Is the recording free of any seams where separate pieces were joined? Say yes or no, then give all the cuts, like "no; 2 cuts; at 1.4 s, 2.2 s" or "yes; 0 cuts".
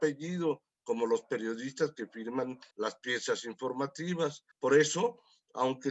no; 2 cuts; at 2.7 s, 4.5 s